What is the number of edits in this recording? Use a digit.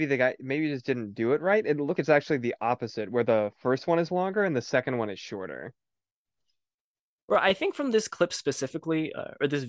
2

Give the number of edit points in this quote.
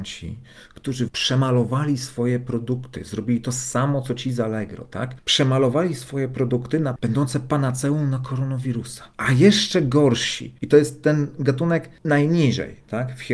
2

